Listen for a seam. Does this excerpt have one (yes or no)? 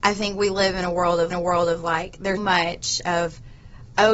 yes